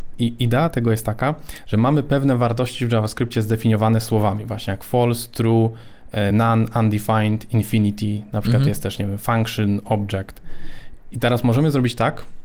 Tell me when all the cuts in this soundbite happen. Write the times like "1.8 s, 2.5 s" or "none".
none